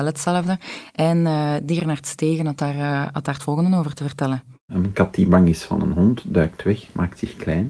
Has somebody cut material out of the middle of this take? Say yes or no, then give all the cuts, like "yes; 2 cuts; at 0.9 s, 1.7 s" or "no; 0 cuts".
no; 0 cuts